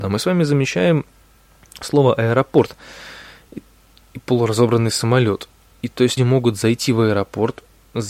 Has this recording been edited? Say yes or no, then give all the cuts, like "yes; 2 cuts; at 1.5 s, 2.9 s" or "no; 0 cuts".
yes; 1 cut; at 6.2 s